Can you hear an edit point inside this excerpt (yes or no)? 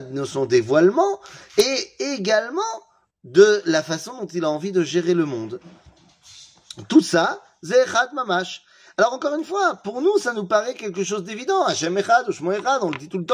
no